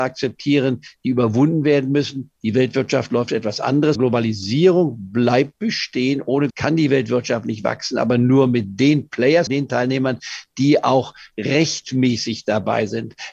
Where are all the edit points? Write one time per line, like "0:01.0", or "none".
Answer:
0:04.0
0:06.5
0:09.5

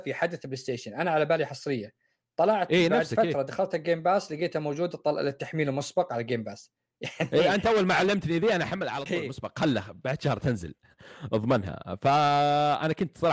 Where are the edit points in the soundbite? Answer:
none

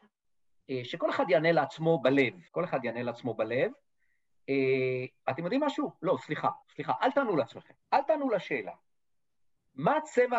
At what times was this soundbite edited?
0:02.5
0:06.6
0:07.8

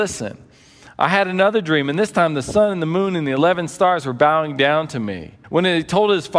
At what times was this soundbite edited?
0:05.4

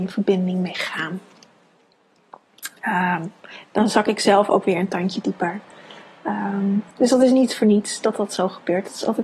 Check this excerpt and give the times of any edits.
0:06.9

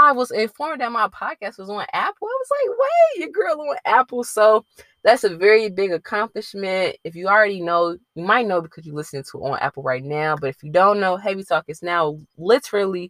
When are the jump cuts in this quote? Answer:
none

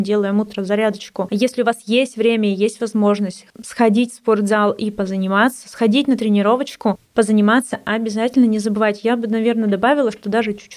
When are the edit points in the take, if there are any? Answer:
none

